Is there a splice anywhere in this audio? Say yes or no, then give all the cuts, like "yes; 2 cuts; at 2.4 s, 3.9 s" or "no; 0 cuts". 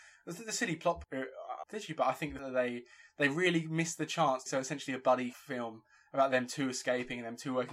yes; 5 cuts; at 1.0 s, 1.6 s, 2.4 s, 4.5 s, 5.3 s